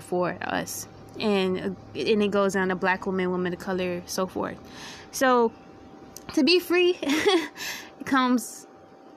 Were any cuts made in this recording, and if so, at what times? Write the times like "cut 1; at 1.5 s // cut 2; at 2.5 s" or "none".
none